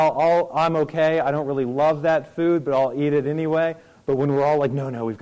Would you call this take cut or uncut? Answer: uncut